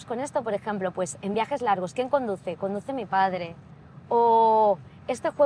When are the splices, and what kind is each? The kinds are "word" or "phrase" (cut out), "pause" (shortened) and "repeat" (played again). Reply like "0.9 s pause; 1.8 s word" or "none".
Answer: none

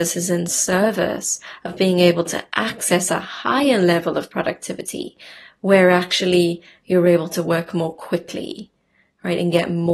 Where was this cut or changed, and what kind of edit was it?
none

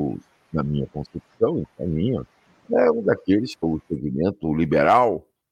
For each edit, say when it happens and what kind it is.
1.6 s word; 3.6 s word

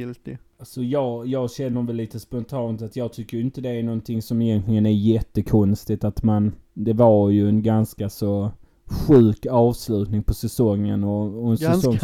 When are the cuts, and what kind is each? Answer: none

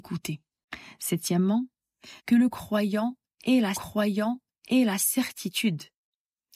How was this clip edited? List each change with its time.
2.2 s pause; 3.7 s repeat

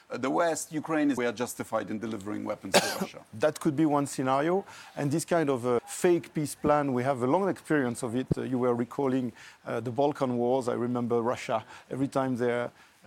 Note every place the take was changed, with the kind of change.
1.2 s phrase; 5.8 s word

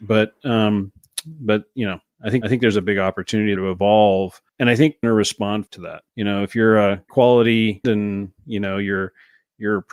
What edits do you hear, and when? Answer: 2.4 s repeat; 3.6 s word; 4.5 s pause; 5.0 s phrase; 5.7 s word; 6.1 s pause; 7.1 s word; 7.8 s word

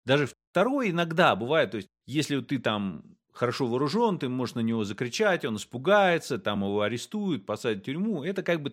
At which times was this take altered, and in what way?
none

